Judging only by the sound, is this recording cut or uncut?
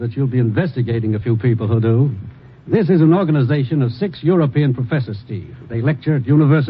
uncut